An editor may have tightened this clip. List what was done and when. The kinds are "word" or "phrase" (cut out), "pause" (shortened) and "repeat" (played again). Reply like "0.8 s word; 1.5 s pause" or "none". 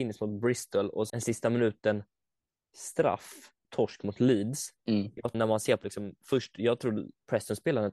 1.1 s word; 3.6 s word; 4.8 s pause; 5.3 s phrase; 5.8 s word